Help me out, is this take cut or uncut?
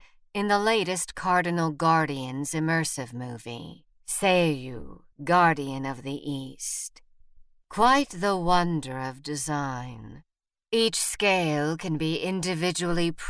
cut